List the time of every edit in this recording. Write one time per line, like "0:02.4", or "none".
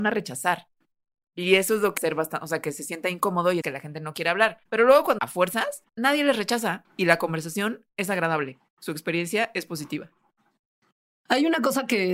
0:02.0
0:03.6
0:04.7
0:05.2
0:05.9